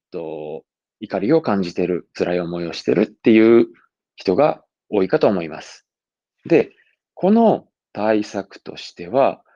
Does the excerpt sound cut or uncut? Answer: uncut